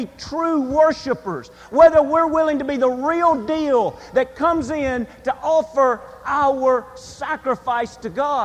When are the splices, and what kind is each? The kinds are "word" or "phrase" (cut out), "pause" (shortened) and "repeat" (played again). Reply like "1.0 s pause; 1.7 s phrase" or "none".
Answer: none